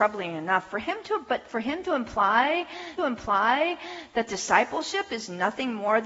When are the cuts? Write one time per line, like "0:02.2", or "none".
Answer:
0:03.0